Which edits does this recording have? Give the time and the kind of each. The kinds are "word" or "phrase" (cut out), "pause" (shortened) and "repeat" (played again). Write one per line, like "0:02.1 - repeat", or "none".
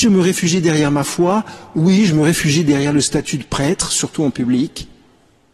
none